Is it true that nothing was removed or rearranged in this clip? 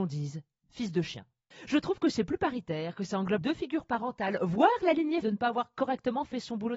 no; 2 cuts; at 3.4 s, 5.2 s

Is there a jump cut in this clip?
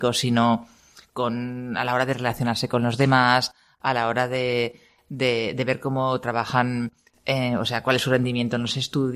no; 0 cuts

